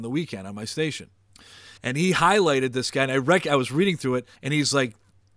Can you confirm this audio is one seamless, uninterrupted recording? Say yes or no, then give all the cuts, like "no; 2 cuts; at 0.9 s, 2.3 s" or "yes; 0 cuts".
no; 2 cuts; at 1.8 s, 4.4 s